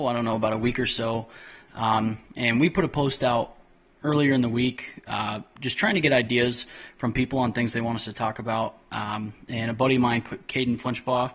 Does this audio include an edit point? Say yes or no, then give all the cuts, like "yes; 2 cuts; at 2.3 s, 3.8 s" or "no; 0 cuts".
no; 0 cuts